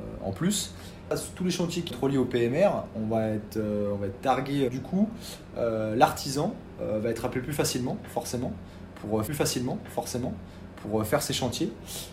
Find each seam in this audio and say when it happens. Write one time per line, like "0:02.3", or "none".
0:01.9
0:04.7
0:09.3